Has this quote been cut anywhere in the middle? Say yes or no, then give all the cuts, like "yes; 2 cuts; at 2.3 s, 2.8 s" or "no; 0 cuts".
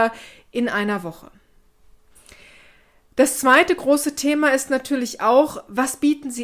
no; 0 cuts